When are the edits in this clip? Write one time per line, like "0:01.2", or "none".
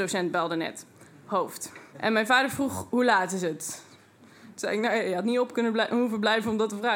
0:01.9